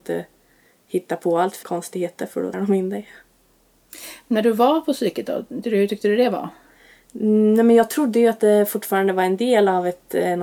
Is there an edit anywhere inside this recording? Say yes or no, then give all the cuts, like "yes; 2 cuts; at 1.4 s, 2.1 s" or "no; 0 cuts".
yes; 3 cuts; at 1.6 s, 2.5 s, 5.6 s